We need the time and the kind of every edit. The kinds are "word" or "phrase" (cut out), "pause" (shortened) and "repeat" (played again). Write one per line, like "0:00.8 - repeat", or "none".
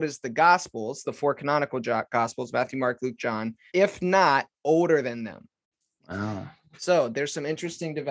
0:03.7 - word